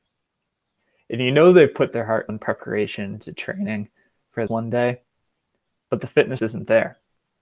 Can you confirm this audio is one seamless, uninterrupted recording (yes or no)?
no